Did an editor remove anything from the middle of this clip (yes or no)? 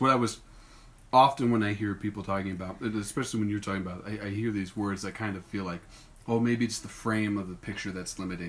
no